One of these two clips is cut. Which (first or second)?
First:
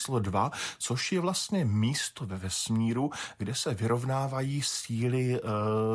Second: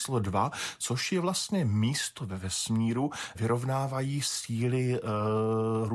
second